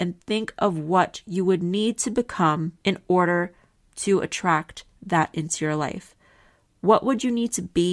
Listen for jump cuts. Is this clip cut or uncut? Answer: uncut